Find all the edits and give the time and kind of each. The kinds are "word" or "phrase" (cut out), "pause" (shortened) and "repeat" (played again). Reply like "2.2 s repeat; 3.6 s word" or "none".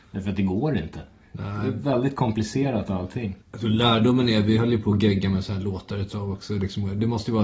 1.2 s pause; 3.4 s pause